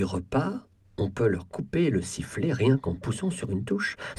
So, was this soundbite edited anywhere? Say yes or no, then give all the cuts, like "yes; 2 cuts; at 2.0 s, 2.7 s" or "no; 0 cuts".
no; 0 cuts